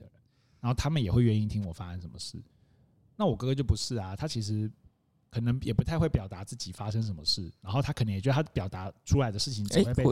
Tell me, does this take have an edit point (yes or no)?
no